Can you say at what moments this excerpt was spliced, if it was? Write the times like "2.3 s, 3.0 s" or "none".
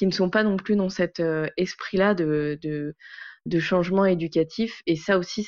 3.5 s